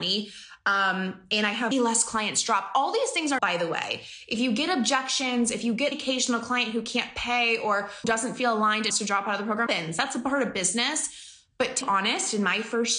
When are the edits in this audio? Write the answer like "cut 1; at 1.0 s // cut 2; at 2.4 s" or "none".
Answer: cut 1; at 1.7 s // cut 2; at 3.4 s // cut 3; at 5.9 s // cut 4; at 8.0 s // cut 5; at 8.9 s // cut 6; at 9.7 s // cut 7; at 11.8 s